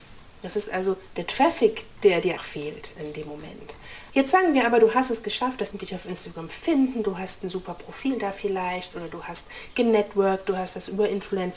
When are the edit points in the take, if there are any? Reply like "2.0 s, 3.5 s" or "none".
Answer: 2.4 s, 5.7 s